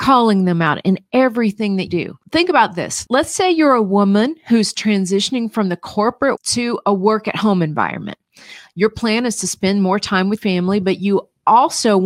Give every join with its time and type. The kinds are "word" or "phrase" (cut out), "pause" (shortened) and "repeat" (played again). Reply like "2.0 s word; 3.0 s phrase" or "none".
1.9 s word; 6.4 s word; 10.4 s word